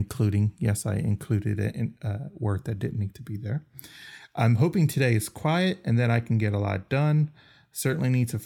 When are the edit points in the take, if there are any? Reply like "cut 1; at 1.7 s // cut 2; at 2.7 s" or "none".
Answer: none